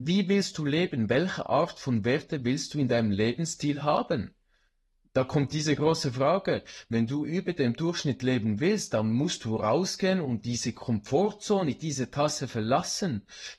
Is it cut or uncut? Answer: uncut